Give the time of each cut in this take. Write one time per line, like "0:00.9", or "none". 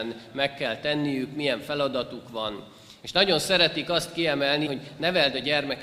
0:04.7